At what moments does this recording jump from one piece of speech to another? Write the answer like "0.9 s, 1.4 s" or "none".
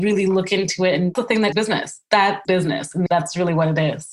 1.2 s, 1.5 s, 2.4 s, 3.1 s